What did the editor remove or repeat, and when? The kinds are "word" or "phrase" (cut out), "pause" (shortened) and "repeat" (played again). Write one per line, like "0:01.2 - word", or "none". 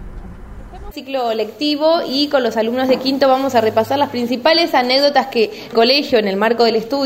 0:00.9 - phrase
0:05.7 - phrase